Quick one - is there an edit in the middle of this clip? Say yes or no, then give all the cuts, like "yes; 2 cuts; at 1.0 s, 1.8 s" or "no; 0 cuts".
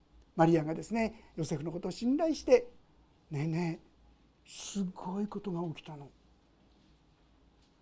no; 0 cuts